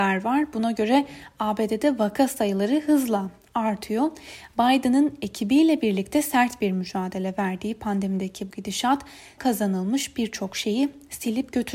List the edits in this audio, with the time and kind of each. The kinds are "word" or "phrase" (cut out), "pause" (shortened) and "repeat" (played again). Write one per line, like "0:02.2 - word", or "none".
0:08.5 - word
0:09.4 - word